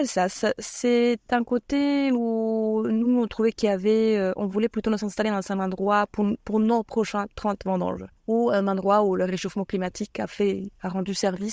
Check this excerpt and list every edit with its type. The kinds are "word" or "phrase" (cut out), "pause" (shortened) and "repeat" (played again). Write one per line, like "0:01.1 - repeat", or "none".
0:08.2 - pause